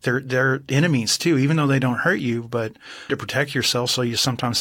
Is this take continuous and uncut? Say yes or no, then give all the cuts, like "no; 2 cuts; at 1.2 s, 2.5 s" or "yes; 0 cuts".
no; 1 cut; at 3.1 s